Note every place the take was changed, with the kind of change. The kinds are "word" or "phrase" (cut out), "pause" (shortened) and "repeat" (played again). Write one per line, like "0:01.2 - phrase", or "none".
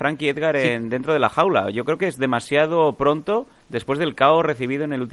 none